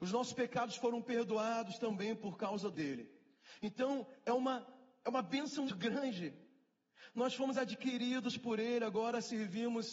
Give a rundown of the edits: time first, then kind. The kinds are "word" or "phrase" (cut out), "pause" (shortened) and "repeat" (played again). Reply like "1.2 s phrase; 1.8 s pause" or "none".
2.7 s word; 5.7 s word